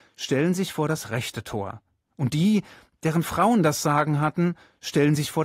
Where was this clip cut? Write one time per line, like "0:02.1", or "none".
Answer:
none